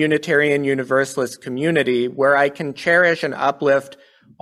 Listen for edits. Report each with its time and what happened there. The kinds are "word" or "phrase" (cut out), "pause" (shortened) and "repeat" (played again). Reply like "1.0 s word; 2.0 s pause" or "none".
none